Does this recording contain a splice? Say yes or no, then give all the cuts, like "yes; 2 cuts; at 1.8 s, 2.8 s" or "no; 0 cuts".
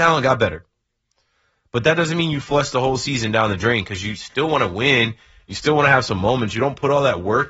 no; 0 cuts